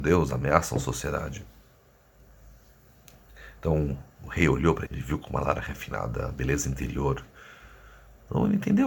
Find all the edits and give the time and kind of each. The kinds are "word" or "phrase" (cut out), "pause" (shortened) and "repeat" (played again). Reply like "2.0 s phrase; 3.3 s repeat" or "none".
4.9 s word